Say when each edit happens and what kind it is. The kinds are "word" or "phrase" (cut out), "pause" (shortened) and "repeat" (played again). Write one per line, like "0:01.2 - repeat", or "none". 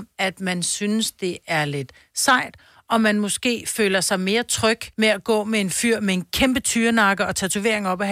0:04.9 - pause